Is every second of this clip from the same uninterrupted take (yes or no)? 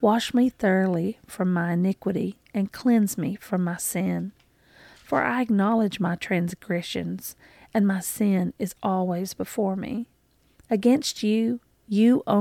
yes